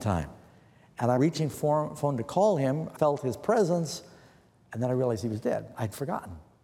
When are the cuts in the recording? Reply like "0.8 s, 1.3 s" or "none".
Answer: 1.2 s, 1.5 s, 3.0 s